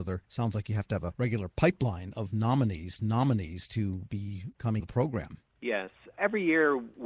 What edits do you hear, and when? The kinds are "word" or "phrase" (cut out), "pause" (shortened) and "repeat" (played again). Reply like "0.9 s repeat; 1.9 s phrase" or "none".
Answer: 3.0 s repeat; 4.8 s word; 5.5 s pause